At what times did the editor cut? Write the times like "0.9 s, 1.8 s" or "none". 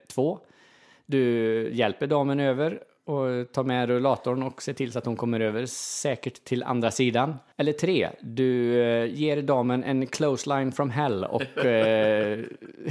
7.5 s